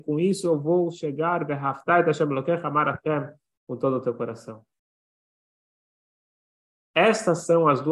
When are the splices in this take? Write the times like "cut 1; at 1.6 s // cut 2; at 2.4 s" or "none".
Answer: none